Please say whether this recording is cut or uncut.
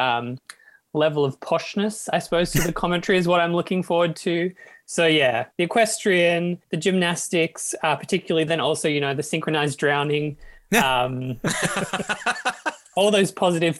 cut